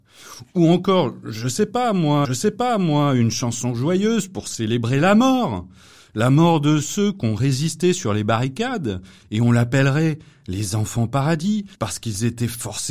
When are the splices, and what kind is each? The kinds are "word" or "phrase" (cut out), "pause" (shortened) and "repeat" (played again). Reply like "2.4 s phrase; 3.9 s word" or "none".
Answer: 2.2 s repeat; 11.7 s pause